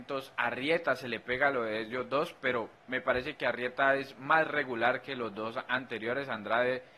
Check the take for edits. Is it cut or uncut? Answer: cut